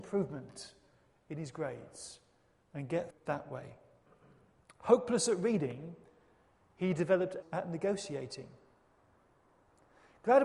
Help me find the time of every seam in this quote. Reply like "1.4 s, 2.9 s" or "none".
3.1 s, 7.4 s